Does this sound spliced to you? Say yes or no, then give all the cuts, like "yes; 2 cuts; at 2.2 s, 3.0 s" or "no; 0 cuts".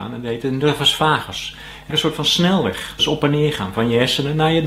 yes; 2 cuts; at 1.9 s, 3.0 s